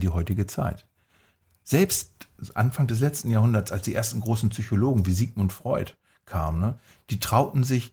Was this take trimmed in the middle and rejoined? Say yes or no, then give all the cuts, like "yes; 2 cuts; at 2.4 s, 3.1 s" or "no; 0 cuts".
no; 0 cuts